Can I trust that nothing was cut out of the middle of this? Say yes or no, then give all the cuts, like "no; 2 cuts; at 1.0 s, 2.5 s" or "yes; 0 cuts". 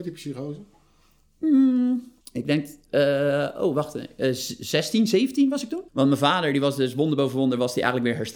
no; 2 cuts; at 2.2 s, 5.9 s